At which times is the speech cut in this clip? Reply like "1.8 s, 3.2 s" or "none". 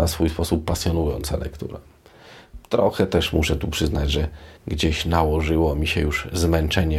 4.6 s